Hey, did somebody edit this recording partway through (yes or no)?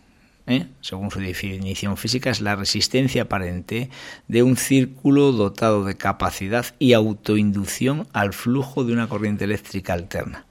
no